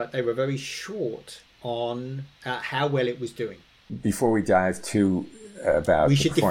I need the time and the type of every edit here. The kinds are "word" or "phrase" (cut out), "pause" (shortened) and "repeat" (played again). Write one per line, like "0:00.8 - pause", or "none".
none